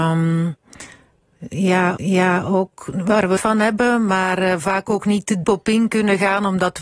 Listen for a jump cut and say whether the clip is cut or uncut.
cut